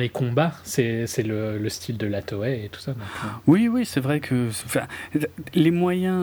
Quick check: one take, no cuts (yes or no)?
yes